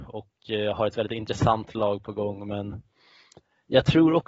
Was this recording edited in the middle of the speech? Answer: no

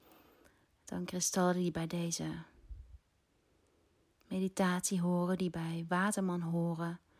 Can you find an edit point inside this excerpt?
no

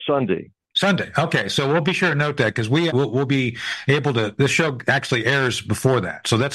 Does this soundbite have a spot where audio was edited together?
yes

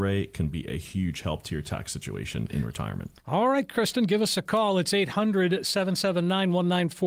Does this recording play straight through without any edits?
no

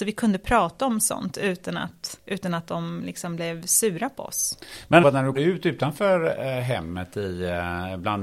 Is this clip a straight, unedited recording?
no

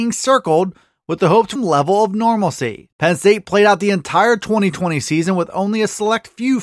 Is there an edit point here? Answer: yes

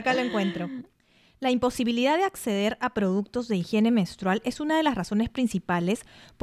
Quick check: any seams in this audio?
no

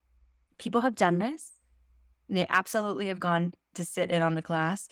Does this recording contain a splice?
no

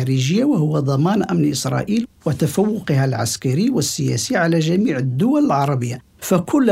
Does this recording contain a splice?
no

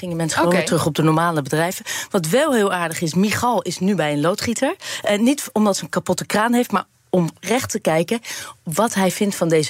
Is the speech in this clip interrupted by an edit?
no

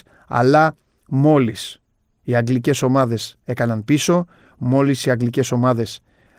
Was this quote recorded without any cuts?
yes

